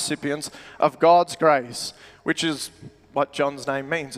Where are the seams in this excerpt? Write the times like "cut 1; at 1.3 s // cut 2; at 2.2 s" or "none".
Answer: none